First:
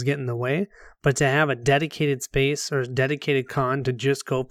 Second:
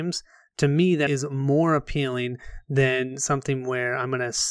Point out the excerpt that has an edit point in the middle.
second; 1 cut; at 1.1 s

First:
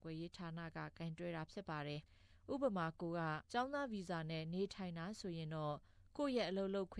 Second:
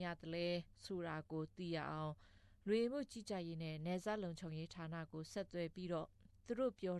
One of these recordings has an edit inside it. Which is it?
first; 2 cuts; at 2.1 s, 3.5 s

